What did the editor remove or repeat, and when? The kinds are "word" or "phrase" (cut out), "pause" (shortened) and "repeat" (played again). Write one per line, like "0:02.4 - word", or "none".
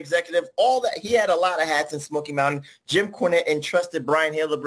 none